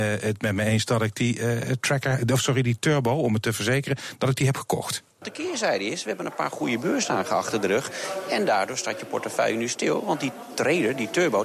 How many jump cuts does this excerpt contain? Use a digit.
1